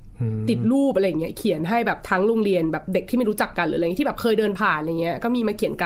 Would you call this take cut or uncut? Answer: uncut